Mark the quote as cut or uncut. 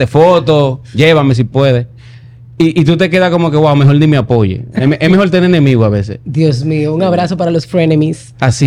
uncut